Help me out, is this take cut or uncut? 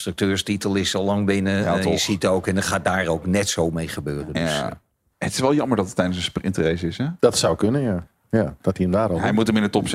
uncut